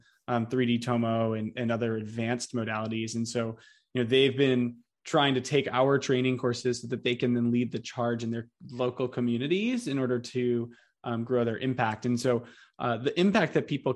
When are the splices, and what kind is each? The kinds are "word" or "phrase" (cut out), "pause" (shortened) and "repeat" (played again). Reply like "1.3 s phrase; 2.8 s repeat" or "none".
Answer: none